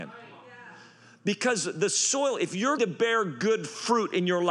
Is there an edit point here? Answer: yes; 1 cut; at 2.8 s

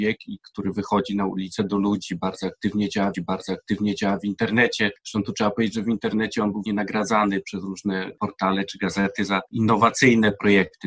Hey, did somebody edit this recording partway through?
yes; 2 cuts; at 3.1 s, 6.6 s

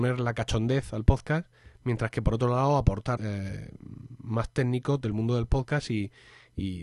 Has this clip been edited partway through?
yes; 1 cut; at 3.2 s

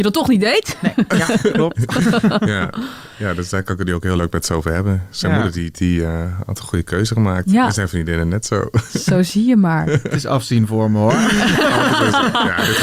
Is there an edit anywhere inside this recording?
yes; 1 cut; at 5.7 s

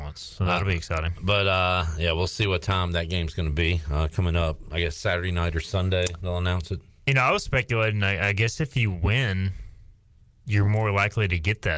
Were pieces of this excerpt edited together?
no; 0 cuts

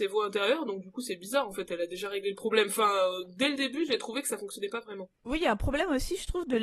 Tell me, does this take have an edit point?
yes; 1 cut; at 5.2 s

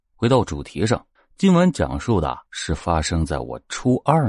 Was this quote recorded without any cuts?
no; 2 cuts; at 1.2 s, 2.5 s

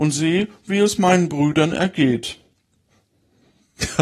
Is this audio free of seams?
yes; 0 cuts

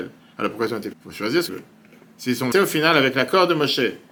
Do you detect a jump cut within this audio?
yes; 3 cuts; at 0.9 s, 1.5 s, 2.5 s

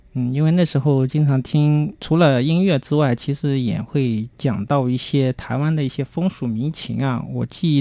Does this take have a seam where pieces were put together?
yes; 1 cut; at 4.3 s

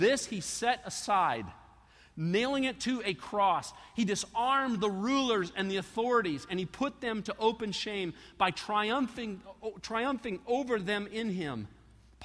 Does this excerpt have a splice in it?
no; 0 cuts

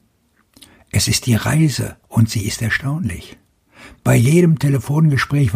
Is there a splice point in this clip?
yes; 1 cut; at 2.0 s

